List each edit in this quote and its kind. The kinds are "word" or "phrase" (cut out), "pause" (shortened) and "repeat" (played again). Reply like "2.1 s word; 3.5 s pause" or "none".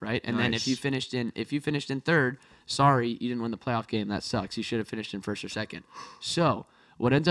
none